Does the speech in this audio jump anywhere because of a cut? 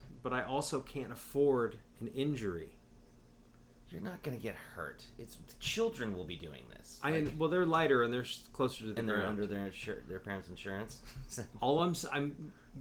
no; 0 cuts

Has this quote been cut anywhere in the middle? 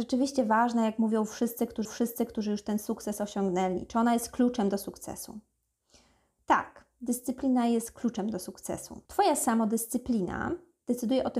yes; 2 cuts; at 1.8 s, 9.1 s

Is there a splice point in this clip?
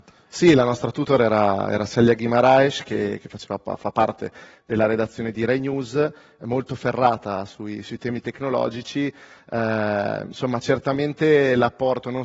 no; 0 cuts

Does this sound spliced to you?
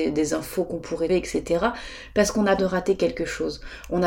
yes; 2 cuts; at 1.1 s, 2.6 s

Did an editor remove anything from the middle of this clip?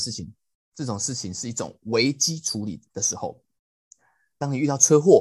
yes; 1 cut; at 2.9 s

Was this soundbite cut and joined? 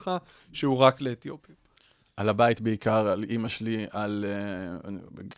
no; 0 cuts

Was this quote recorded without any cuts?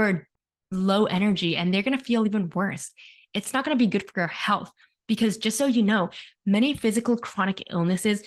yes; 0 cuts

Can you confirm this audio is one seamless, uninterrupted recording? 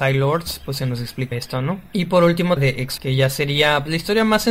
no; 3 cuts; at 1.3 s, 2.6 s, 3.0 s

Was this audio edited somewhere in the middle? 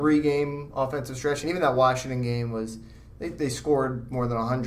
no; 0 cuts

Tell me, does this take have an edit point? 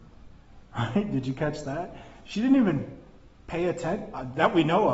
no; 0 cuts

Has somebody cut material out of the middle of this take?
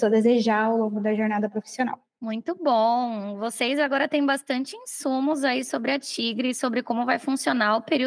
no; 0 cuts

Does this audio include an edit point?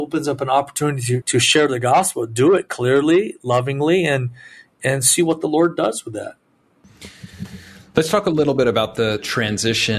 yes; 1 cut; at 1.2 s

